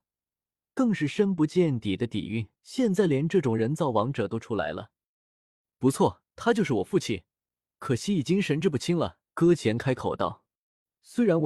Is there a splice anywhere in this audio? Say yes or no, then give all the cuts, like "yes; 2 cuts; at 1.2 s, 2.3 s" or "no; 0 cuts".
yes; 3 cuts; at 2.6 s, 6.3 s, 9.3 s